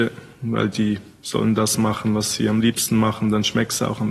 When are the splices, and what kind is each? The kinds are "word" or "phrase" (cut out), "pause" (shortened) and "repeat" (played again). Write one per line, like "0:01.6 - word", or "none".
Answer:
none